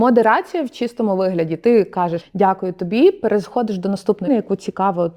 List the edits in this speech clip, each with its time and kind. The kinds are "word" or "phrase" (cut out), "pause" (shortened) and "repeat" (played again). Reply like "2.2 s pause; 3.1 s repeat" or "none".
2.2 s word; 4.3 s word

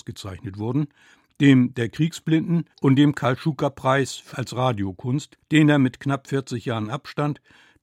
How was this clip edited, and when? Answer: 2.7 s pause; 4.3 s word; 5.4 s pause

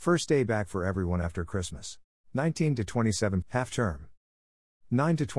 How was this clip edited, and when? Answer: 2.1 s pause; 3.4 s word

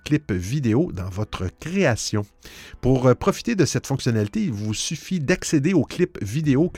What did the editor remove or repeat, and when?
none

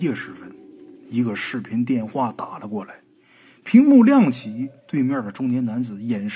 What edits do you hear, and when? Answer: 4.8 s pause

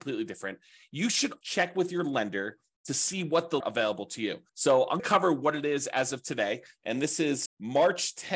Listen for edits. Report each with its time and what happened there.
1.4 s word; 3.6 s phrase; 4.5 s pause; 5.0 s word; 7.5 s word

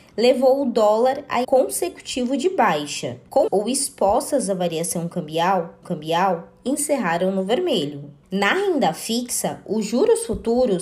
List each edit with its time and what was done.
1.4 s phrase; 3.5 s phrase; 5.8 s repeat

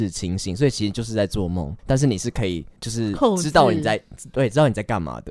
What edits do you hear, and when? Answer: 1.8 s pause; 2.8 s pause

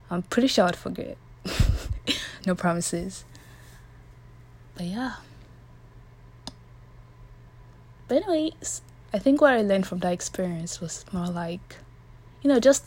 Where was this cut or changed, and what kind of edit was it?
2.4 s word; 9.1 s word

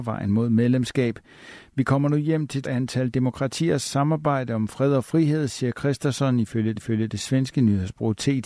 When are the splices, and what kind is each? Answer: 2.6 s word; 6.8 s repeat

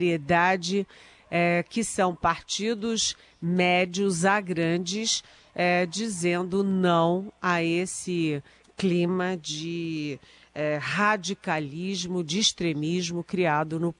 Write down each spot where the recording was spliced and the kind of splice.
none

